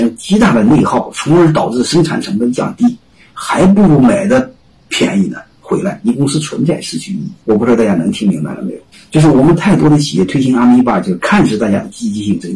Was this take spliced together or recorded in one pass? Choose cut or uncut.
cut